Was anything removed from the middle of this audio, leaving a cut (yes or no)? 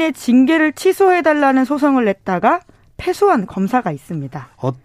no